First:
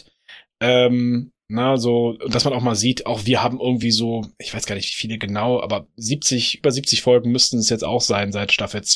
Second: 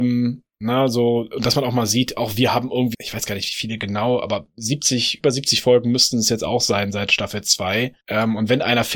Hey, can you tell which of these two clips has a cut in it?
second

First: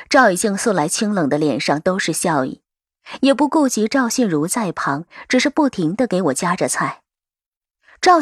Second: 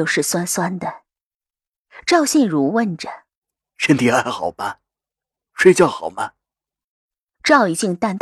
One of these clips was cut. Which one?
second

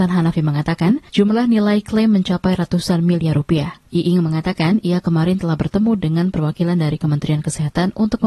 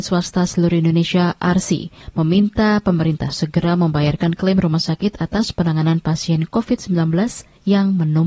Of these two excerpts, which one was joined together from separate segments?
first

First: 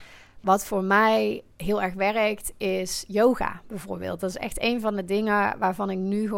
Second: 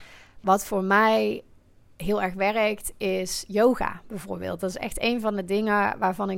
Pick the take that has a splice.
first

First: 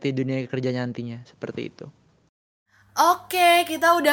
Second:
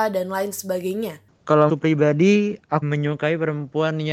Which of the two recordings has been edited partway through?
second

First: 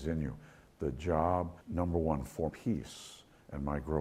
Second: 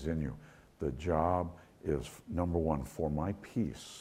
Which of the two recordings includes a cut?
first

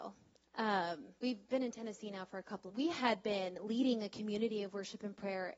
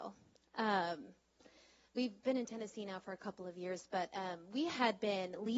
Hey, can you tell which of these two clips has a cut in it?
first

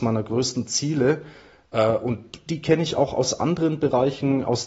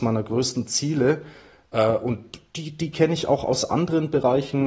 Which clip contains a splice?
first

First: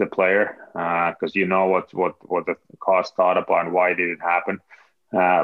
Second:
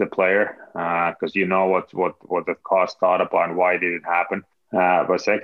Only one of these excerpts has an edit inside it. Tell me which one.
second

